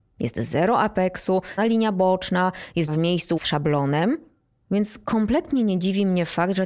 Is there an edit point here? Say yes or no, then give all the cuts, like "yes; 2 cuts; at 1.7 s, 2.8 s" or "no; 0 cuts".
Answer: yes; 3 cuts; at 1.6 s, 2.9 s, 3.4 s